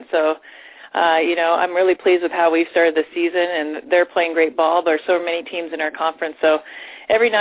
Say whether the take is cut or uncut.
uncut